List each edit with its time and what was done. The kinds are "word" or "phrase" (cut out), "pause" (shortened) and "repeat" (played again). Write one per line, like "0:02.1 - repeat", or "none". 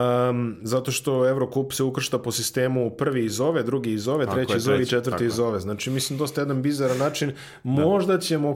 none